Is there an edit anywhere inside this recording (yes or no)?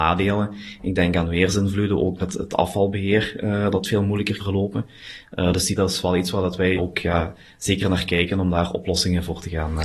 yes